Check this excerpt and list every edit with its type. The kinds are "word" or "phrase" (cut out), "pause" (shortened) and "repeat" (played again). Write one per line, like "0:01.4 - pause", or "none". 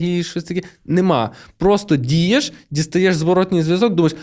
none